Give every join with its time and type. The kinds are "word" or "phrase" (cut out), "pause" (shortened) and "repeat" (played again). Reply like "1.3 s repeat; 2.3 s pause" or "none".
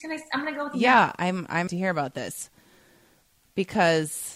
1.7 s word